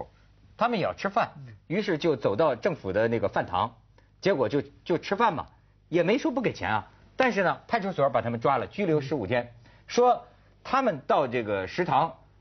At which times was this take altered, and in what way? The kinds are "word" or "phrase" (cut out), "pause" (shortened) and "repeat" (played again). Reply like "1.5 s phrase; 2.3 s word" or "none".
none